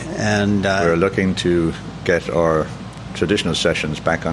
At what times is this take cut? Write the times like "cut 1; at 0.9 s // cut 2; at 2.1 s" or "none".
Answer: none